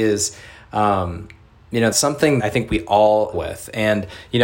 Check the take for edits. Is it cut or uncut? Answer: cut